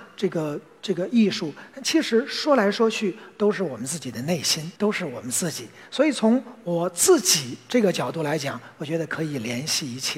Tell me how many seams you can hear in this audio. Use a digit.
1